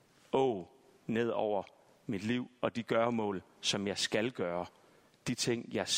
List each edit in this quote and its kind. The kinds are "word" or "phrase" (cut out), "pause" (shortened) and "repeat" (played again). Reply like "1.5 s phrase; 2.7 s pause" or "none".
none

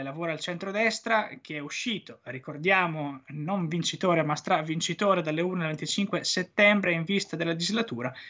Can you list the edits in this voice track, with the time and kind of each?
none

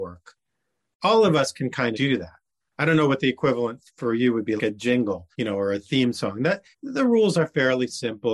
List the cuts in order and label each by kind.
1.9 s word; 3.9 s pause; 4.6 s word; 5.3 s pause; 6.7 s pause

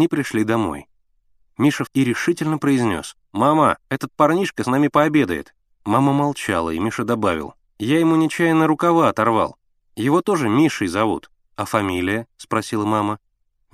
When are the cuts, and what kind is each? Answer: 1.9 s phrase

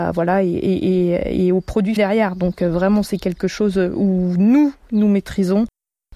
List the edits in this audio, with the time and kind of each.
2.0 s phrase

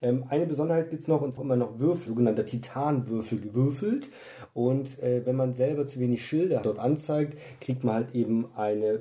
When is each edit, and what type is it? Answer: 1.4 s phrase; 2.1 s word; 6.6 s phrase

